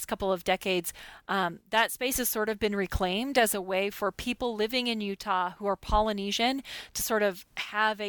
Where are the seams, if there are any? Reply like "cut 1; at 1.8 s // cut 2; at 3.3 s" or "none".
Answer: none